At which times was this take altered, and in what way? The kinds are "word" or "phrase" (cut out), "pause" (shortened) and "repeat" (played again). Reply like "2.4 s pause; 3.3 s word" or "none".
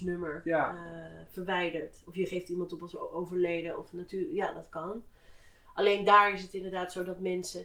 none

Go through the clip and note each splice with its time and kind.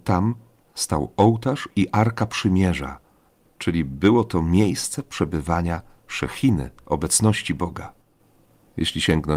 none

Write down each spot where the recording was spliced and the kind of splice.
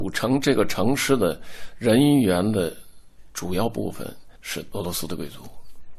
4.4 s pause

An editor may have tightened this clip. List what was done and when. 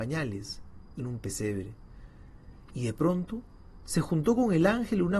1.0 s word

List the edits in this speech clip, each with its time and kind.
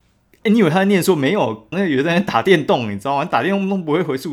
1.7 s word

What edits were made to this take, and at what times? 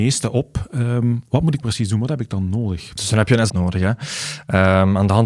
1.6 s word; 3.5 s word

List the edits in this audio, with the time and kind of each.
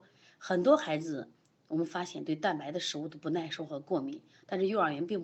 none

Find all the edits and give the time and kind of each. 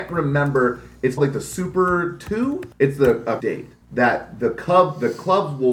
1.2 s word; 2.7 s pause; 3.4 s word; 3.8 s pause

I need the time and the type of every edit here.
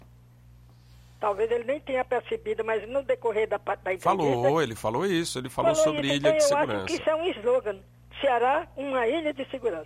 none

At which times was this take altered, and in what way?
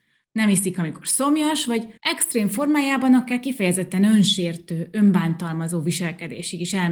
2.0 s pause

